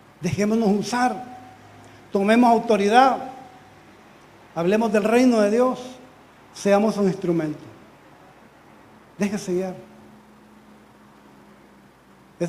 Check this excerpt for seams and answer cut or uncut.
uncut